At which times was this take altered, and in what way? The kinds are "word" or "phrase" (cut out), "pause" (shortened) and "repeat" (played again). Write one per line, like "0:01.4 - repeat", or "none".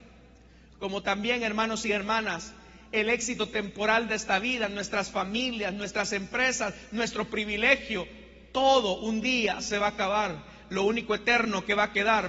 none